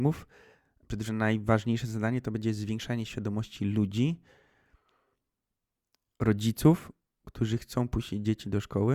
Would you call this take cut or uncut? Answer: cut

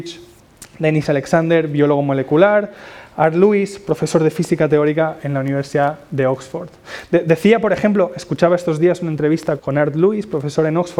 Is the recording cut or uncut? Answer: cut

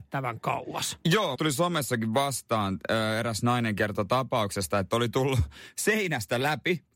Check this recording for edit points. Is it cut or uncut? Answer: cut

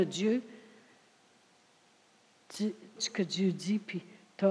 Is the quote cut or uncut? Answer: cut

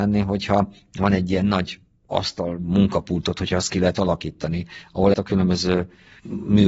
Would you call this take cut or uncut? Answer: cut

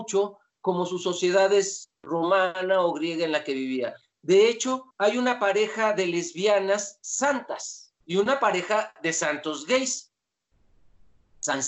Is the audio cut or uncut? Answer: cut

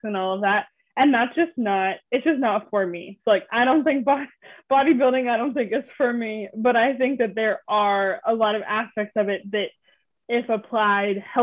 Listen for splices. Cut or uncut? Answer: uncut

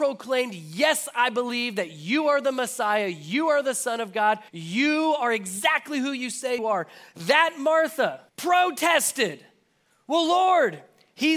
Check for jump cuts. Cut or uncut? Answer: cut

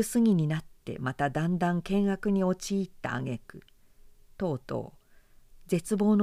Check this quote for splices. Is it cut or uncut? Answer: uncut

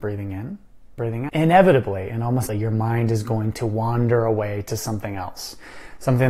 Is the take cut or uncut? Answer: cut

